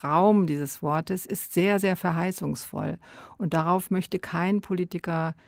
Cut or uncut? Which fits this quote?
uncut